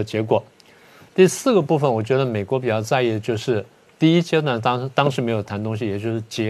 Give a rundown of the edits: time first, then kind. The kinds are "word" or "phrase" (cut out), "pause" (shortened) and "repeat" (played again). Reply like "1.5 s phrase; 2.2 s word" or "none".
none